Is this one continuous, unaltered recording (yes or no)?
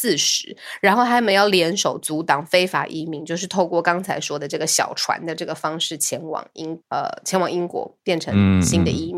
no